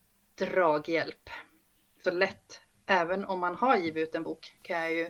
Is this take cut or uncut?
cut